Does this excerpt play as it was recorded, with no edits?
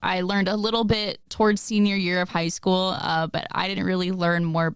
yes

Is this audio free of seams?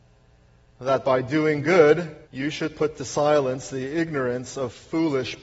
no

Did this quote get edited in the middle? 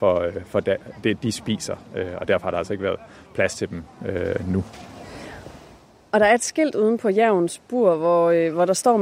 no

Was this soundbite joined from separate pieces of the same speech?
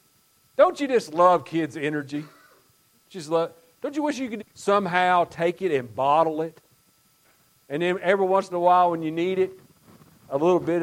yes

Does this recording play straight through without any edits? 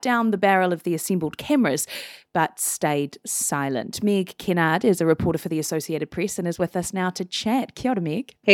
yes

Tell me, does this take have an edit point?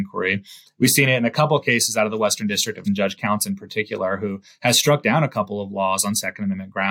yes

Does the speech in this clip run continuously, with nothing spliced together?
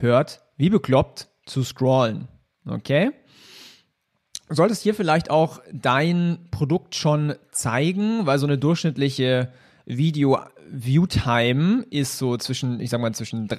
yes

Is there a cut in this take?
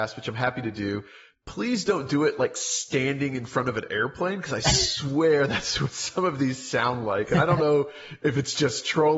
no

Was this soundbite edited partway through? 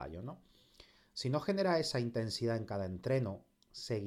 no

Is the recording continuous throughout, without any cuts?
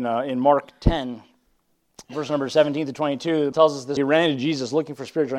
no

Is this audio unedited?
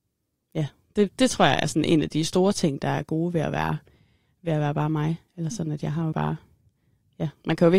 no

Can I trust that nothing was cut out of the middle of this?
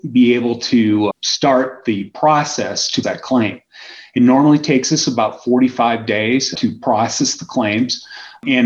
no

